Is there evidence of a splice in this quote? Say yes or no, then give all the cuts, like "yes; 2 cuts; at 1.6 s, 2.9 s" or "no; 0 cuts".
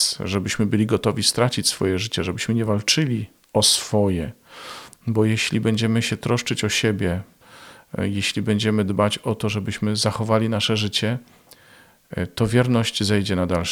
no; 0 cuts